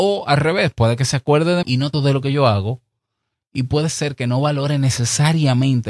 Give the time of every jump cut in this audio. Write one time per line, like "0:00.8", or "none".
0:01.6
0:01.9